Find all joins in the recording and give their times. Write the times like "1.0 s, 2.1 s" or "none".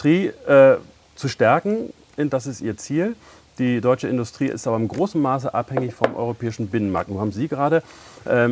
2.3 s